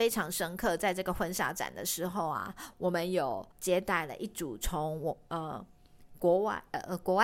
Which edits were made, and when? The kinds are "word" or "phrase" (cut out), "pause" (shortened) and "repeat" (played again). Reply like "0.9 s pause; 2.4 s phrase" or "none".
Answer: 3.5 s pause